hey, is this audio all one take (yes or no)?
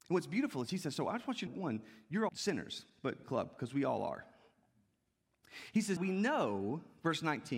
no